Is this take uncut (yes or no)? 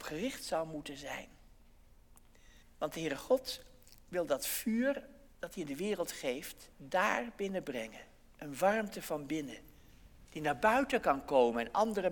no